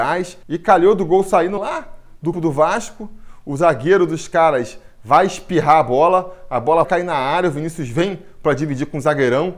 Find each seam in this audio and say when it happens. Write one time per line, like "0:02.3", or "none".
0:01.6
0:02.3
0:06.8

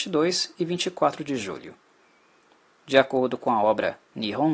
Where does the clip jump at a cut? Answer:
none

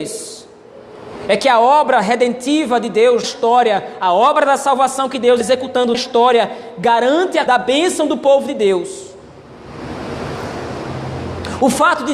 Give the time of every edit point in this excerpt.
0:03.2
0:05.4
0:05.9
0:07.5

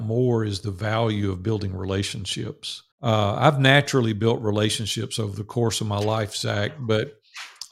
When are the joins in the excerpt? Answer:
0:02.9

